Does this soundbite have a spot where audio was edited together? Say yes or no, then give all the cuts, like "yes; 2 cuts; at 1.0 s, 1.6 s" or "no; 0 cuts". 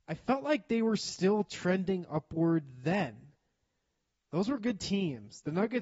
no; 0 cuts